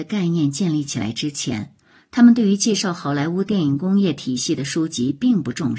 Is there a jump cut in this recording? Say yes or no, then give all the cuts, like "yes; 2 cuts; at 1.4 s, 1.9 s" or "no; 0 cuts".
no; 0 cuts